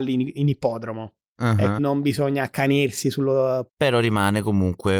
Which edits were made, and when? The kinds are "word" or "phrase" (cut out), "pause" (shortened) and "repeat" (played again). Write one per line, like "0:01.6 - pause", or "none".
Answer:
0:01.3 - pause
0:01.8 - word
0:03.7 - phrase